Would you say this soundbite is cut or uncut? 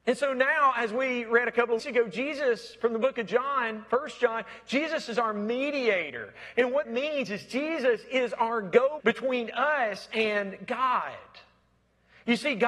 cut